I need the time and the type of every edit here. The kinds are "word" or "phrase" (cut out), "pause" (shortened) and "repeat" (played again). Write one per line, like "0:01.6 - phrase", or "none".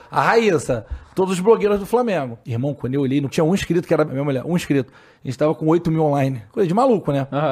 0:02.4 - pause
0:03.3 - phrase
0:04.0 - word
0:06.5 - pause